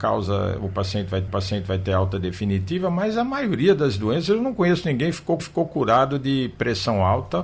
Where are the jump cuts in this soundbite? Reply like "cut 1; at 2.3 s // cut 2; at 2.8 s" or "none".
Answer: cut 1; at 1.3 s // cut 2; at 5.4 s